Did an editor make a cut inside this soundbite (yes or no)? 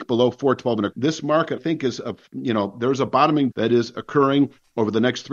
yes